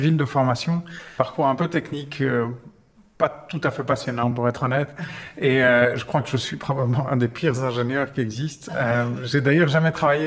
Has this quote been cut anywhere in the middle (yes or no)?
no